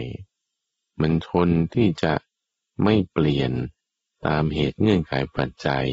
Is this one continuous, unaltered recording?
yes; 0 cuts

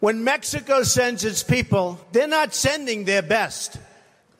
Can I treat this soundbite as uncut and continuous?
no; 1 cut; at 2.0 s

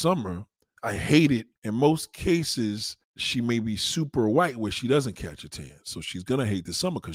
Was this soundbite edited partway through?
yes; 2 cuts; at 1.6 s, 3.0 s

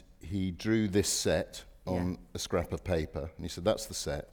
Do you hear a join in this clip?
no; 0 cuts

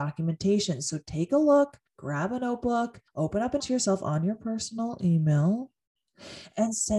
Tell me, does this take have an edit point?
yes; 3 cuts; at 1.9 s, 3.1 s, 3.6 s

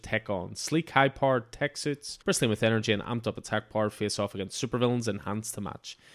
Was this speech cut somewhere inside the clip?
yes; 1 cut; at 2.2 s

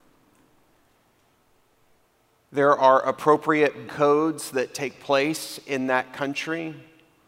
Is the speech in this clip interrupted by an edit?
yes; 1 cut; at 3.9 s

